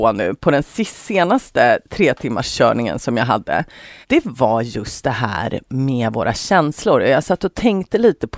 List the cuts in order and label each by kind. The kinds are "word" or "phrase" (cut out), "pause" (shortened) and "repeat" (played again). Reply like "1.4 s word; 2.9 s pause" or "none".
4.0 s pause